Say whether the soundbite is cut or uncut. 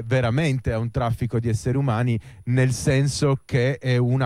uncut